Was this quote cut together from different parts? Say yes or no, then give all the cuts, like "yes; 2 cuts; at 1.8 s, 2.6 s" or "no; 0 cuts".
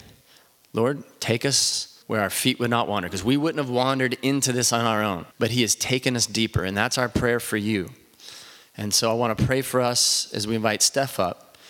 yes; 2 cuts; at 2.0 s, 5.3 s